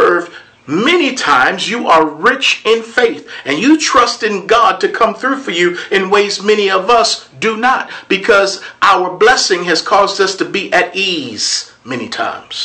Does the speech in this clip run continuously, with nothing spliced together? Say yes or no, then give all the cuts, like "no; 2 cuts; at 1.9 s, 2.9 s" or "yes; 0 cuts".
yes; 0 cuts